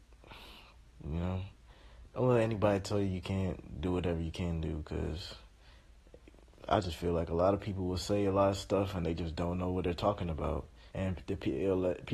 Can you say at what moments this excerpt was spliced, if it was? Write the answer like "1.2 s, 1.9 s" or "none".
10.9 s